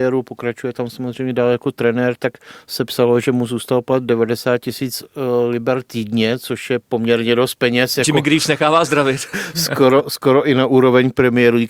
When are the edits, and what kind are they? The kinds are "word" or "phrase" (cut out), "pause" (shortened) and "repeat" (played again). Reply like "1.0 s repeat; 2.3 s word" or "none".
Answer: none